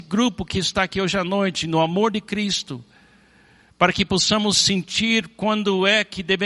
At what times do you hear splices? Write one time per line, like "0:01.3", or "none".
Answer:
none